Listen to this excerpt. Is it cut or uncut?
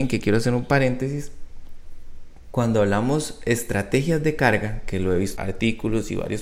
cut